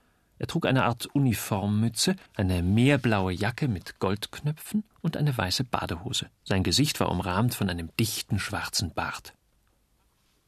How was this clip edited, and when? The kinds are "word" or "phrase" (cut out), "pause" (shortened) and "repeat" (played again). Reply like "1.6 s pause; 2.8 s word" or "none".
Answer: 2.3 s pause; 4.9 s pause; 6.3 s pause